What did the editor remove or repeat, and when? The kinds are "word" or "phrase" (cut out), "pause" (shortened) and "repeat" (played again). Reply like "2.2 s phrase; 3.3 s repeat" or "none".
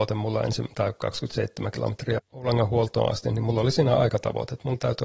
2.2 s word